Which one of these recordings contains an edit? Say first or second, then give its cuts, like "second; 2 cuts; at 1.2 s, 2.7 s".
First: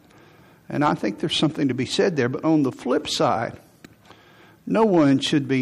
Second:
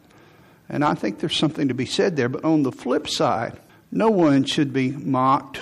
second; 1 cut; at 3.7 s